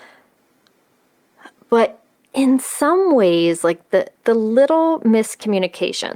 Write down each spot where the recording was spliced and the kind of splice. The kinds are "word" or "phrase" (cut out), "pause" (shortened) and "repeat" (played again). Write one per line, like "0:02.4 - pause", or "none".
0:04.1 - pause